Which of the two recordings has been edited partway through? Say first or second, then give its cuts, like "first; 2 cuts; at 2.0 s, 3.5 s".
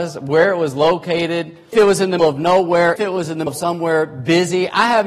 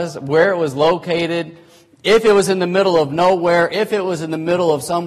first; 4 cuts; at 1.7 s, 2.2 s, 3.0 s, 3.5 s